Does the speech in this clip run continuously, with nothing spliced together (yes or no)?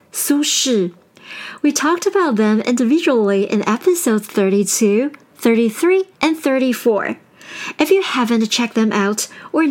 no